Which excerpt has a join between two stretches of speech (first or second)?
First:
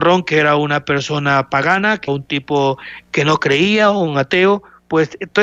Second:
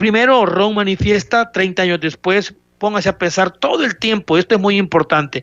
first